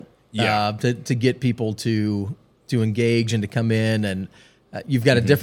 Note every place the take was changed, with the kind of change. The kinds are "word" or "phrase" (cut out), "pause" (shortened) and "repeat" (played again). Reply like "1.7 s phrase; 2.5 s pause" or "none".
none